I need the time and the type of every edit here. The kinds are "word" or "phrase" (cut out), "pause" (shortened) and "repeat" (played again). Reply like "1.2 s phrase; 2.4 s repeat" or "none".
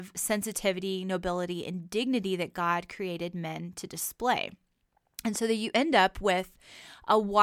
none